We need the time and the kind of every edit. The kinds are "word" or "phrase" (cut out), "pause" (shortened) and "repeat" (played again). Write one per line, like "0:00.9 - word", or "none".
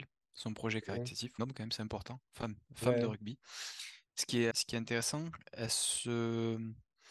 0:01.4 - phrase
0:04.5 - word